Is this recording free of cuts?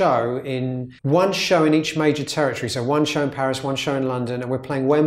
no; 1 cut; at 1.0 s

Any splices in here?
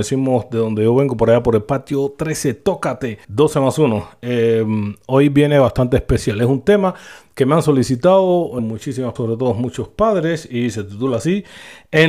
yes; 3 cuts; at 3.2 s, 8.6 s, 9.2 s

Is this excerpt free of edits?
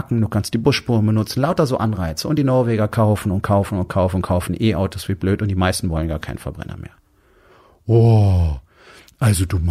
yes; 0 cuts

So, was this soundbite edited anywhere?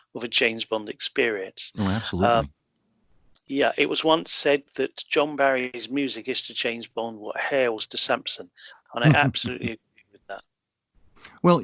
no; 0 cuts

